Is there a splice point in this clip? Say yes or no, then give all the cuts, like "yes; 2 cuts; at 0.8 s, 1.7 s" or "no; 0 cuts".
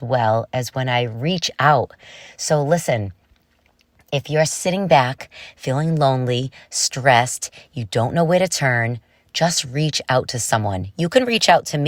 no; 0 cuts